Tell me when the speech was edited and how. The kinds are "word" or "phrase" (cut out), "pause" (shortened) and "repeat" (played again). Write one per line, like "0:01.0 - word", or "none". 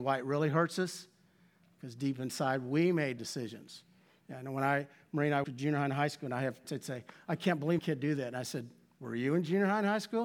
0:03.2 - word
0:05.4 - word
0:06.6 - word
0:07.8 - word